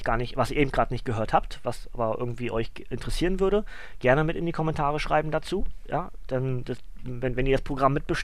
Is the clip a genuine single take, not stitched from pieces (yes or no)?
yes